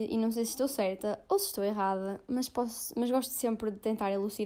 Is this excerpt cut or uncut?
uncut